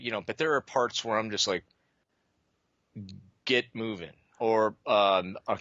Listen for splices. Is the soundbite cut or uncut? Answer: uncut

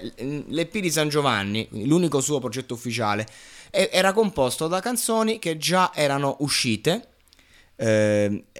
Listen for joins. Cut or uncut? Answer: uncut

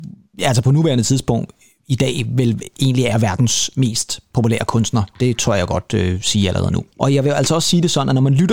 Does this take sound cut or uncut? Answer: uncut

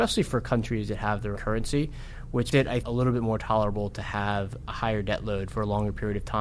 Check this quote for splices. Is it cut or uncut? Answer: cut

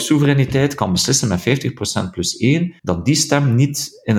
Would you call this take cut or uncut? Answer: cut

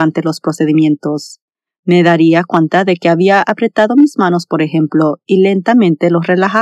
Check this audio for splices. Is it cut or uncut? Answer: uncut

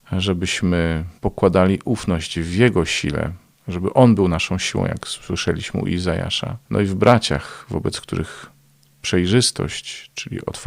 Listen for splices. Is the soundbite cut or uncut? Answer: cut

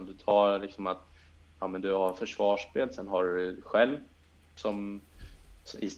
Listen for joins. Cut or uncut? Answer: uncut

